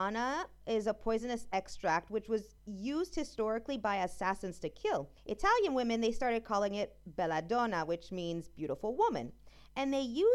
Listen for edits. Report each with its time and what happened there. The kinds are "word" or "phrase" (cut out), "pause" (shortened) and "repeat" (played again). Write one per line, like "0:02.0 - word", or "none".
0:02.6 - pause
0:05.2 - pause